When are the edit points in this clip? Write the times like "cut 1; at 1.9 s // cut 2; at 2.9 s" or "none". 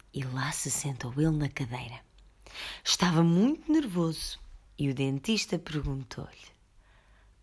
cut 1; at 4.7 s